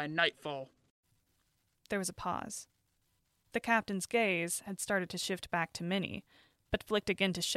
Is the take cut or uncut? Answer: uncut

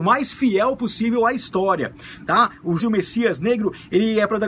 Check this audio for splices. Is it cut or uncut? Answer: cut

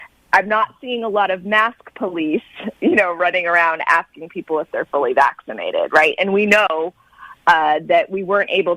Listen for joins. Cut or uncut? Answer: uncut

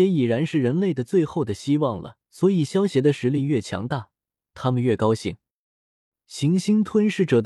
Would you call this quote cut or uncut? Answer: cut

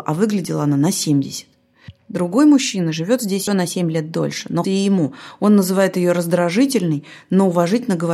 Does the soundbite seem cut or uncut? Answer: cut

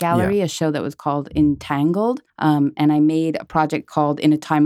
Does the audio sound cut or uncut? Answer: cut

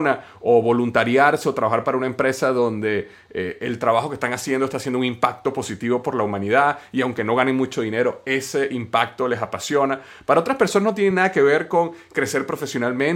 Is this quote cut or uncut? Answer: uncut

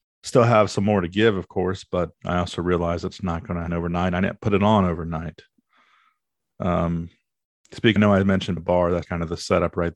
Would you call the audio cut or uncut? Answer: cut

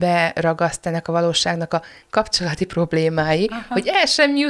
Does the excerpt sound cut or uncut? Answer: uncut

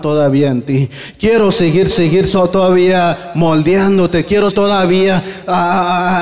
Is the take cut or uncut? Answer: cut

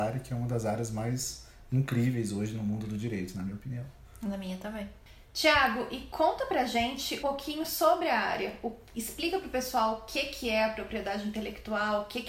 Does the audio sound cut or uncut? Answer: cut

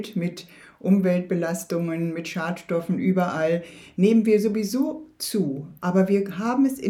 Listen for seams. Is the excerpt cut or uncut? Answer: uncut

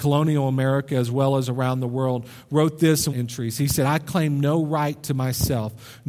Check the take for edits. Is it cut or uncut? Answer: cut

